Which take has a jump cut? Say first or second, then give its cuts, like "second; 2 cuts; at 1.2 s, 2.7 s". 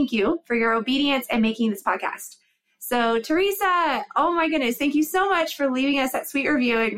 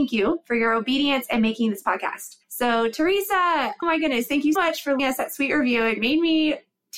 second; 4 cuts; at 2.4 s, 3.8 s, 4.6 s, 5.0 s